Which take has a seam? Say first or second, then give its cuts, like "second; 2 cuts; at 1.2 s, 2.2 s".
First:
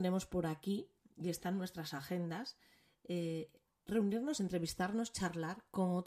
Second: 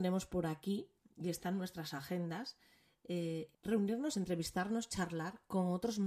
second; 1 cut; at 3.5 s